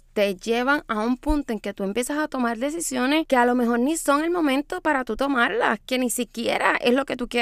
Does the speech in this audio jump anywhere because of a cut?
no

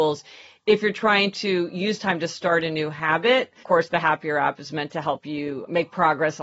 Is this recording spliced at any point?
yes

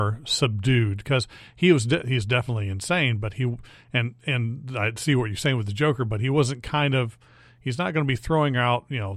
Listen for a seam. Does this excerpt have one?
no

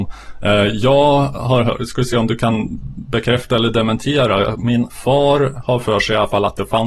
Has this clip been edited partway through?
no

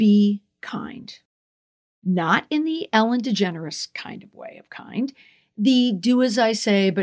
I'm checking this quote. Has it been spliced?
no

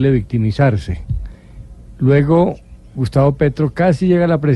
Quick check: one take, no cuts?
yes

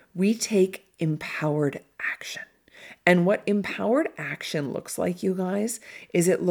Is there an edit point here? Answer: no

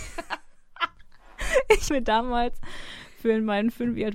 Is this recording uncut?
no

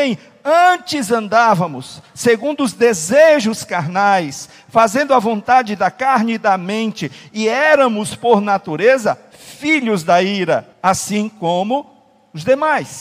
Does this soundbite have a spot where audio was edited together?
yes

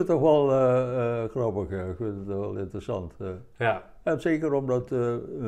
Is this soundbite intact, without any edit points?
yes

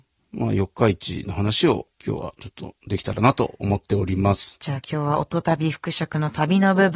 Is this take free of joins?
no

